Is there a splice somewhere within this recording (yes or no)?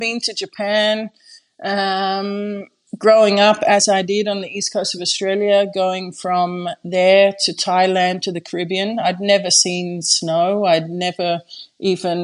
no